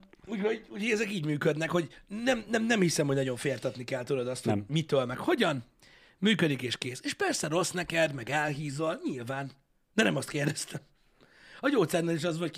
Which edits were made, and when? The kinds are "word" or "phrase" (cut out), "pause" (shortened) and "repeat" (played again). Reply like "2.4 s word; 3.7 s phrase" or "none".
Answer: none